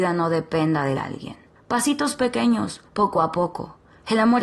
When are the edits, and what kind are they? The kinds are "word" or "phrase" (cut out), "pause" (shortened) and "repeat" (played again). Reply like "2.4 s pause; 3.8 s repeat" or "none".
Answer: 1.0 s phrase; 1.6 s pause; 2.9 s pause